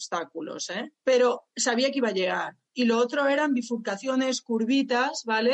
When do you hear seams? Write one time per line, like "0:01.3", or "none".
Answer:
0:00.9